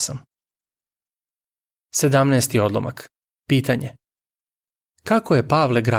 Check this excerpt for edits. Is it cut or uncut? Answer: uncut